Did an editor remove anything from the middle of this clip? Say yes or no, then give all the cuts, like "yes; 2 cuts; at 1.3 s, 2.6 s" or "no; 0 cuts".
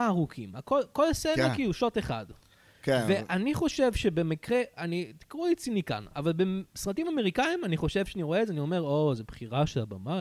no; 0 cuts